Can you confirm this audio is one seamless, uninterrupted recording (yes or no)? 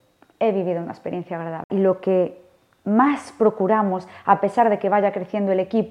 yes